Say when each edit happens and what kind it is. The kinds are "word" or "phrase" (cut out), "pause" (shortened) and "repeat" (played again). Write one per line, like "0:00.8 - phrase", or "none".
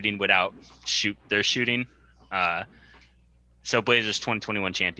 none